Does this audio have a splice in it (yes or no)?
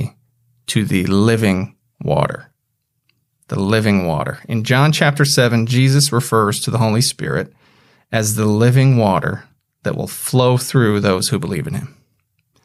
no